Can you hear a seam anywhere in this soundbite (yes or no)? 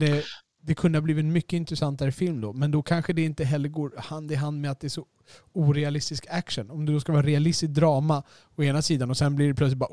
no